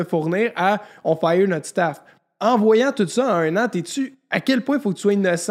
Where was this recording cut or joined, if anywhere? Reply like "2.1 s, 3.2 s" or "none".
none